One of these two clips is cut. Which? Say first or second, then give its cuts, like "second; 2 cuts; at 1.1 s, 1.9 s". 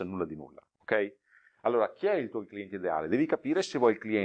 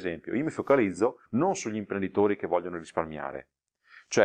second; 1 cut; at 1.3 s